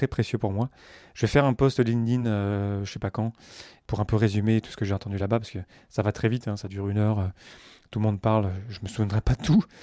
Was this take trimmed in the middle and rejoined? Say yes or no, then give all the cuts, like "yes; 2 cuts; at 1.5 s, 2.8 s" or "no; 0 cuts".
no; 0 cuts